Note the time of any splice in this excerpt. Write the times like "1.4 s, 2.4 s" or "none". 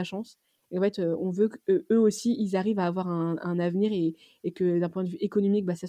none